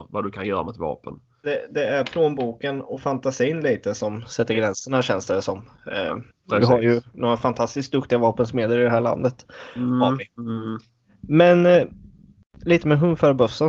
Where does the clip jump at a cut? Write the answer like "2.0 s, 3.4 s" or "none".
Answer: none